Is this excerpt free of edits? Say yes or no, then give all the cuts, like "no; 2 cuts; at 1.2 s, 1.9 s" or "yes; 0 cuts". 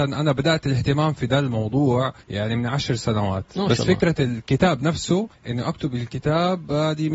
no; 2 cuts; at 2.2 s, 5.3 s